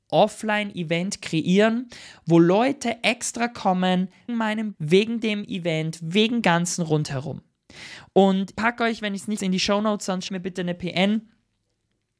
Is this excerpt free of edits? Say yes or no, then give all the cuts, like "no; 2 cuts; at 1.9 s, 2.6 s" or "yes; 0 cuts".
no; 6 cuts; at 4.3 s, 4.7 s, 6.4 s, 8.5 s, 9.4 s, 10.3 s